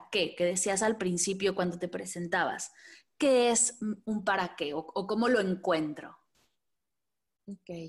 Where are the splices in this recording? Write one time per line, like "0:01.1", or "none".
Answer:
none